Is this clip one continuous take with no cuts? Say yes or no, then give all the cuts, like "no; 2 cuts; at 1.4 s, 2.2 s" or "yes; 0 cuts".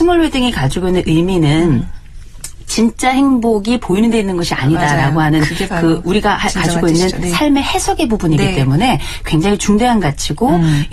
yes; 0 cuts